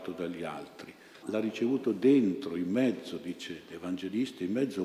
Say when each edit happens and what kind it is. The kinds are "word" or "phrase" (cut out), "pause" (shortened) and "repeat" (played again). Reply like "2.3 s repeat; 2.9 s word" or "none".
1.2 s word